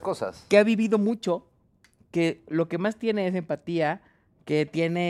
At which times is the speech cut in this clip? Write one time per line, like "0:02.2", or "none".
none